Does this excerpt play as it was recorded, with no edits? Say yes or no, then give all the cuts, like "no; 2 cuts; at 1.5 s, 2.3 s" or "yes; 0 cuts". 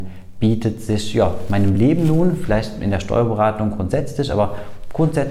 yes; 0 cuts